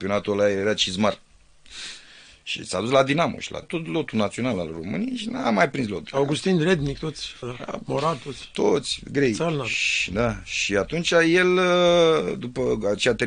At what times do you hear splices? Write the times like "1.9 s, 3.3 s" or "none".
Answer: 3.6 s, 7.4 s